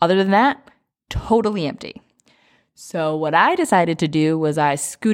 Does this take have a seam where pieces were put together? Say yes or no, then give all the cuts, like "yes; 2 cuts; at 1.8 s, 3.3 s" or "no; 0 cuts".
no; 0 cuts